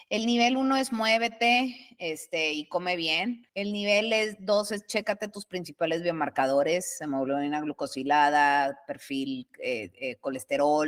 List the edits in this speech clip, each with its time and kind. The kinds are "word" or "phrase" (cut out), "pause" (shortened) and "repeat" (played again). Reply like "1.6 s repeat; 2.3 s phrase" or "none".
3.5 s pause